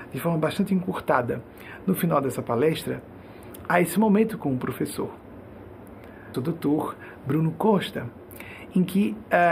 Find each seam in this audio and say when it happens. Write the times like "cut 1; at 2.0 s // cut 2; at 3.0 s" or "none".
cut 1; at 6.3 s